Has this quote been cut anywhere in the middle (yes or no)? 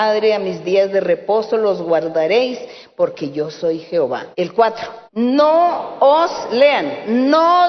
yes